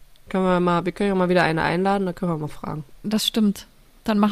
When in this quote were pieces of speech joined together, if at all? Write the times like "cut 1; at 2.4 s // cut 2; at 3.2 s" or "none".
none